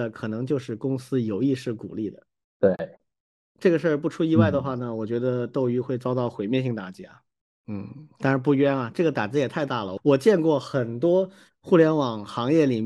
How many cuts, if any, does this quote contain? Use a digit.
0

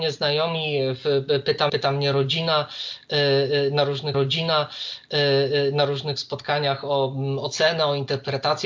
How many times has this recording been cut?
2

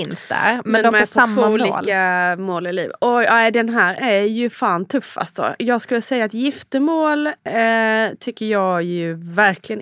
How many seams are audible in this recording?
3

